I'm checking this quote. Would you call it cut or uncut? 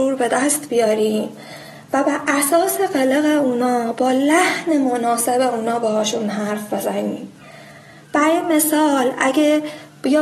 uncut